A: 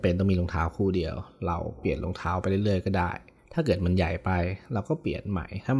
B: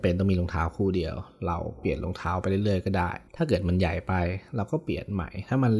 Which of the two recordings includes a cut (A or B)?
B